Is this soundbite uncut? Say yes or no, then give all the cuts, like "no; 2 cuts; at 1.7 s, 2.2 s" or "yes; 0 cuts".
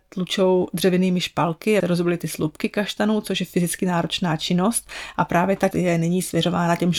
no; 2 cuts; at 1.8 s, 5.7 s